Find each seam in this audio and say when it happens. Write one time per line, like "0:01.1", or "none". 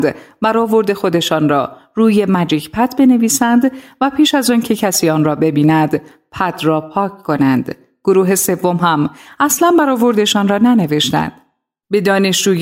none